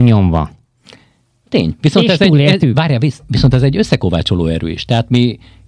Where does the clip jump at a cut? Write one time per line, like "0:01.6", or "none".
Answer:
none

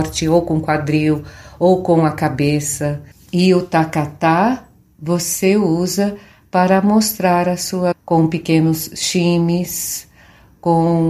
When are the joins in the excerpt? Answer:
0:03.1
0:07.9

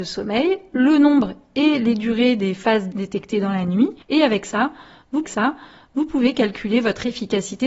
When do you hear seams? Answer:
0:02.9
0:04.0
0:05.2

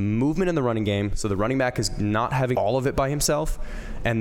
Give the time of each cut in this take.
0:02.5

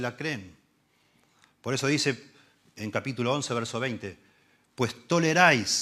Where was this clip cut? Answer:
none

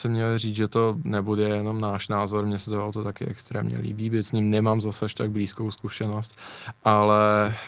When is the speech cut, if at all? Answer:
none

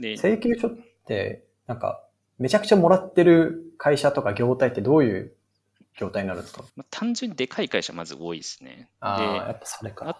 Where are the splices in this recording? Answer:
0:02.2
0:06.7

